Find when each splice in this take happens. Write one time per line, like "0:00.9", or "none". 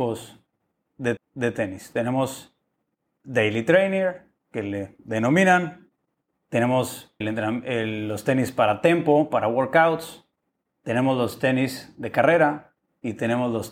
0:01.2
0:03.2
0:07.2